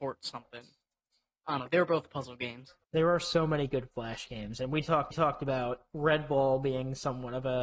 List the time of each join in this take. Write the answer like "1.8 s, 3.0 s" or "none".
2.8 s, 5.1 s